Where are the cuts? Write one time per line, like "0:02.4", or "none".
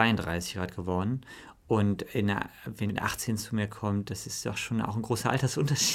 0:02.9